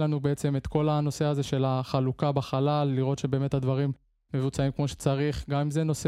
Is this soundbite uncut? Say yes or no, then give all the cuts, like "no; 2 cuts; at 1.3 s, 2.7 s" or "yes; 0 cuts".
yes; 0 cuts